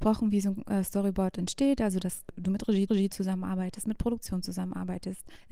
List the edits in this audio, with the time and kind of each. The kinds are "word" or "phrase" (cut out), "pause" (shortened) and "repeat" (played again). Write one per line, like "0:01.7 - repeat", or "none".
0:02.9 - repeat